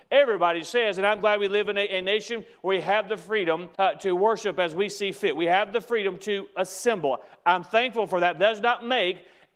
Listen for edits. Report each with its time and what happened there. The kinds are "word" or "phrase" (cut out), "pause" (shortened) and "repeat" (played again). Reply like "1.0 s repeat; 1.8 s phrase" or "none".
3.7 s pause

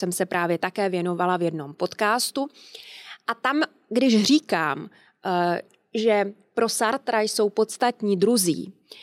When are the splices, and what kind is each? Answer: none

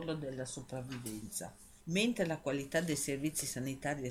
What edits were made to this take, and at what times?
1.8 s pause

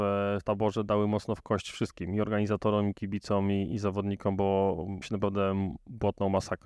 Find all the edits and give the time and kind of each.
5.0 s word

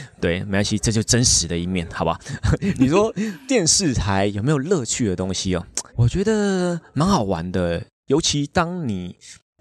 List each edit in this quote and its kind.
5.9 s pause

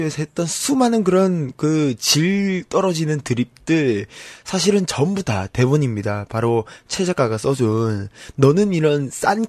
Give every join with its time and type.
none

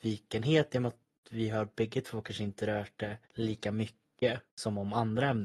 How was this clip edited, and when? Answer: 3.2 s pause; 4.5 s pause

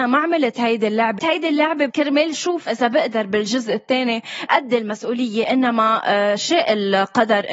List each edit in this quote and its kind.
1.2 s phrase; 1.9 s word; 2.7 s word; 4.5 s phrase

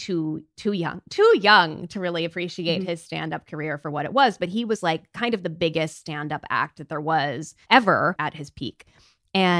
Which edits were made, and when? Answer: 7.6 s pause

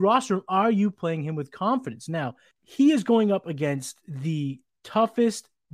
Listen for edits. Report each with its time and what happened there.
none

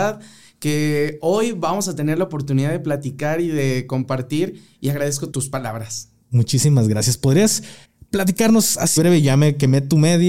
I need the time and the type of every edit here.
5.3 s word; 7.8 s pause; 9.0 s word

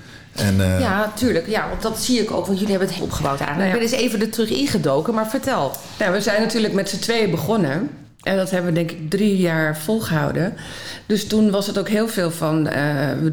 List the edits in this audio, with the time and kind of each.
1.8 s word; 3.0 s phrase

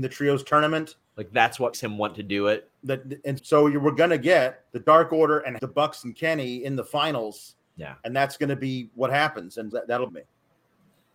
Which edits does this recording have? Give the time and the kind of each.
1.7 s word; 2.7 s pause; 3.4 s word; 4.7 s pause; 5.6 s phrase; 9.7 s word; 10.1 s phrase

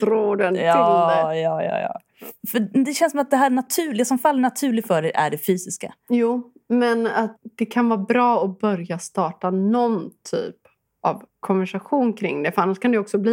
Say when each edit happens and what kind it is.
none

